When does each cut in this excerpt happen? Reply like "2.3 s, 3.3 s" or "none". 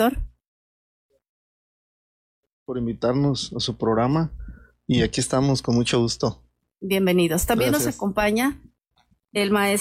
none